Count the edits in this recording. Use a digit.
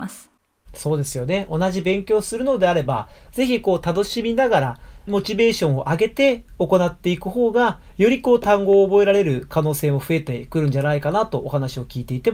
1